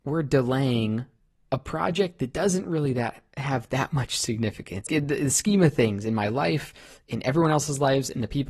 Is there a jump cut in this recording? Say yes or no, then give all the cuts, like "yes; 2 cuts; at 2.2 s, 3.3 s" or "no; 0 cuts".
yes; 1 cut; at 4.9 s